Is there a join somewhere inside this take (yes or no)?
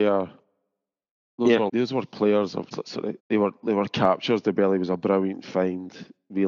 yes